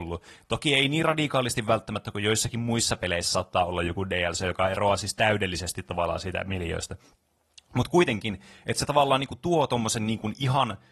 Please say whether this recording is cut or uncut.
uncut